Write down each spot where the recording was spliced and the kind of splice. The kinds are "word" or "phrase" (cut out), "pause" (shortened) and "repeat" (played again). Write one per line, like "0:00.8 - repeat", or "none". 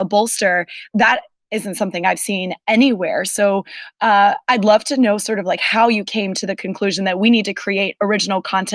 0:00.9 - word